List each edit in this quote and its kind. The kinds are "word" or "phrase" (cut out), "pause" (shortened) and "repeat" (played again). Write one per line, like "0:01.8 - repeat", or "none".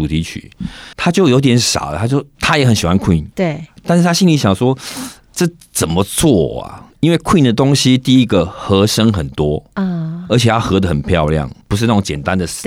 0:00.9 - pause
0:03.3 - pause
0:06.9 - pause
0:11.6 - pause